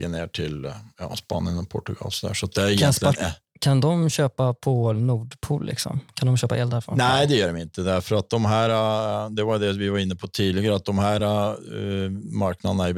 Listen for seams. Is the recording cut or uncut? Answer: uncut